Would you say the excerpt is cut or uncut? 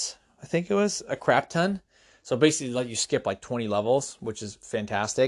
uncut